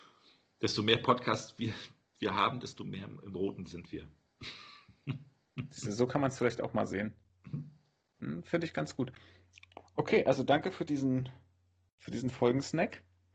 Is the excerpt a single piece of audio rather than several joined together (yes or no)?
yes